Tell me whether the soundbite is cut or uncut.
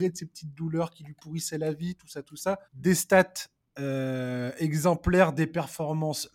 cut